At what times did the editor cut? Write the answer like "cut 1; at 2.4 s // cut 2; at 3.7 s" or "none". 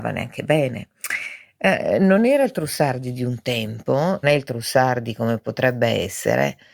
cut 1; at 4.2 s